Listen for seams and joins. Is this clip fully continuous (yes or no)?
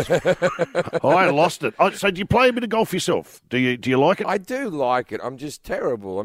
yes